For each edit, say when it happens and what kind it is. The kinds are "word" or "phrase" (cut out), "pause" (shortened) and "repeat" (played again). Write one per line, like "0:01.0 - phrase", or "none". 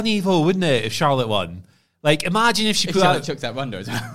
none

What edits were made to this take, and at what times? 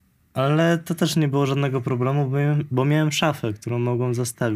none

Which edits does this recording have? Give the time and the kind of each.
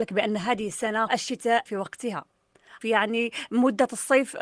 0:01.1 - word
0:01.7 - word
0:02.8 - word

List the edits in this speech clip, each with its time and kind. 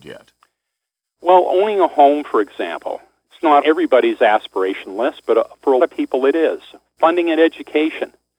0:03.6 - word
0:05.8 - word

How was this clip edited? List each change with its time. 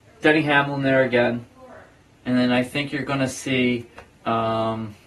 none

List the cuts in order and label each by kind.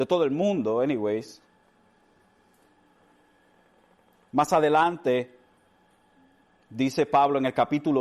none

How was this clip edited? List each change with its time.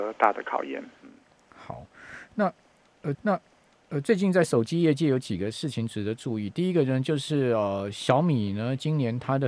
0:03.1 - repeat

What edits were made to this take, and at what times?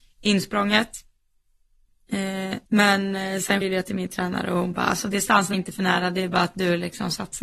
0:02.7 - pause
0:03.6 - word
0:05.5 - word

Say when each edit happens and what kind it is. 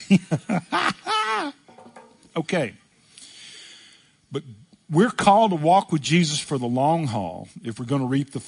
none

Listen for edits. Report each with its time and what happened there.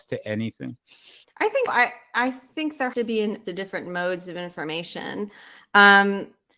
0:01.2 - pause
0:01.7 - word
0:02.9 - word
0:03.5 - word

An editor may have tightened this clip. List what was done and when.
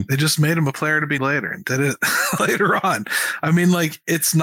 0:01.2 - word
0:02.4 - word

